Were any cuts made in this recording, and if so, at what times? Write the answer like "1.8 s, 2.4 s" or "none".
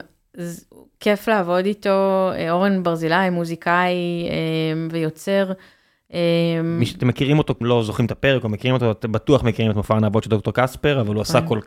7.6 s